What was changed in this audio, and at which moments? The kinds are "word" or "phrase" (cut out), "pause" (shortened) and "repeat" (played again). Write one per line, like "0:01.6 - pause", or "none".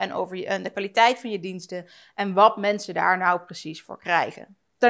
none